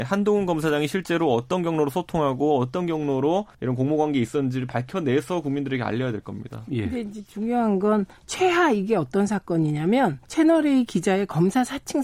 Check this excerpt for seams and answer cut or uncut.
cut